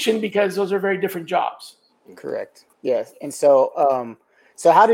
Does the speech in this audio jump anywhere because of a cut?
no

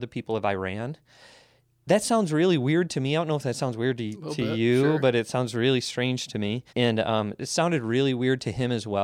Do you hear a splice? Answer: yes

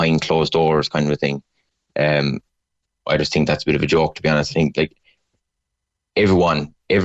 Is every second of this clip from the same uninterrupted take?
yes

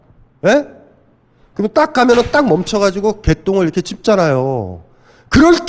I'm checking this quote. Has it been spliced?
no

